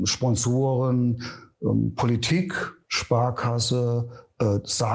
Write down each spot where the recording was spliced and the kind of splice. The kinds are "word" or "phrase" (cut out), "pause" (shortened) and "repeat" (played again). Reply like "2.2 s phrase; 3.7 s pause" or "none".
2.8 s pause